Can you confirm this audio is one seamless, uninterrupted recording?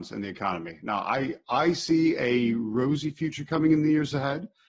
yes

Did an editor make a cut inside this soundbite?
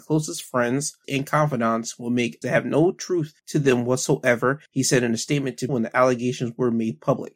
yes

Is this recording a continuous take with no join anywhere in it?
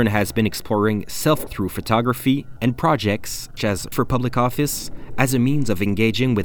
no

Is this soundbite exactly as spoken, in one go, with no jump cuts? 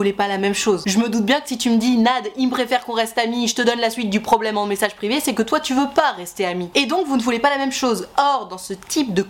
yes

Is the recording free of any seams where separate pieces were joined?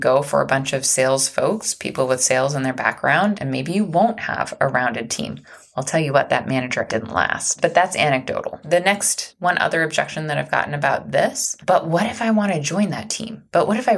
no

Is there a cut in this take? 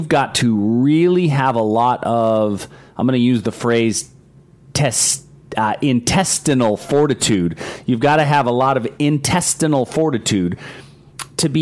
no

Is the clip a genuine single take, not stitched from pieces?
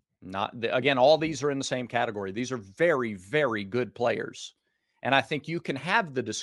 yes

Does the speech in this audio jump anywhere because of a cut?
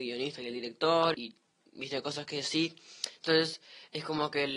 yes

